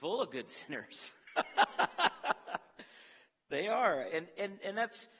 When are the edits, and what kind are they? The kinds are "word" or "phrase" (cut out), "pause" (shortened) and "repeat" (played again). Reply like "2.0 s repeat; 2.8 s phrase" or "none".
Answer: none

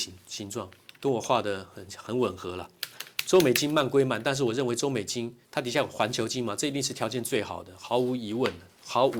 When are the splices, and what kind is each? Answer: 5.4 s pause

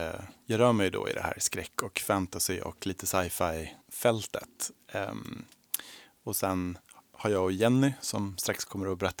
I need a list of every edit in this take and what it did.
3.8 s pause

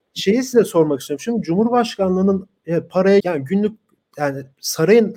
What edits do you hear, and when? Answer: 3.2 s word

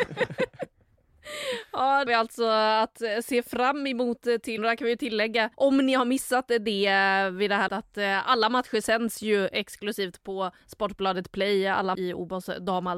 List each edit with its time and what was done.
2.1 s phrase; 4.6 s word; 5.5 s pause; 7.7 s word; 10.6 s pause; 11.9 s word

